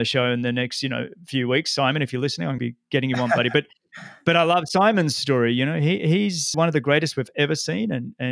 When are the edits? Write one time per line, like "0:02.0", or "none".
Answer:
0:02.6
0:06.5